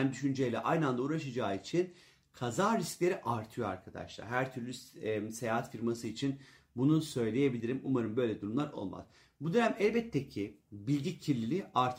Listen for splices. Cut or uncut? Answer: uncut